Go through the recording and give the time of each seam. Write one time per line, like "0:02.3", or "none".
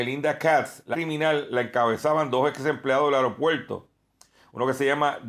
0:00.9